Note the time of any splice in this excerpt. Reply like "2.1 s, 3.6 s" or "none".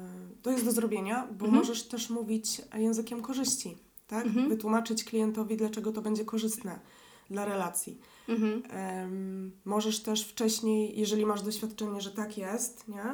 none